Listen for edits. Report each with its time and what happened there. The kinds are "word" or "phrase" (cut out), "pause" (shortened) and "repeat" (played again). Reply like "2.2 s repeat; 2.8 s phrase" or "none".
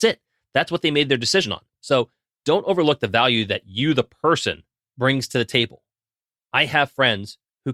none